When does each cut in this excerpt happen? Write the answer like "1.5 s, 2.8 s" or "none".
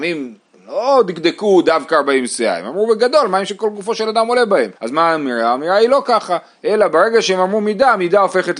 4.8 s